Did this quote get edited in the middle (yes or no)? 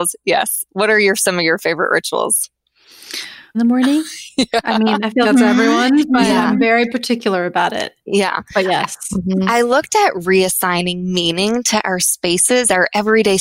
yes